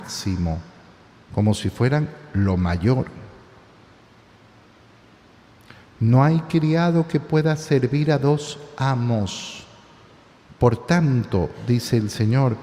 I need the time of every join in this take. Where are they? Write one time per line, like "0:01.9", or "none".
none